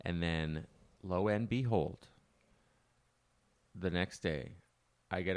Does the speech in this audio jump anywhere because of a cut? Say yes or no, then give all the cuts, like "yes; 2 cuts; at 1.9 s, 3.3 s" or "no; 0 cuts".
no; 0 cuts